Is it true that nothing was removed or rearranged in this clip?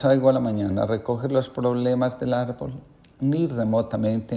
yes; 0 cuts

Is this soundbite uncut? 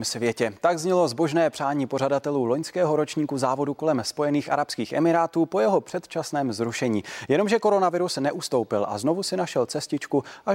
yes; 0 cuts

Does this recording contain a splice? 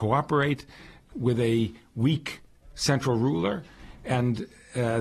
no; 0 cuts

